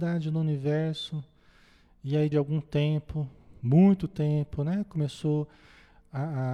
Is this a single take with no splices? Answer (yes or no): no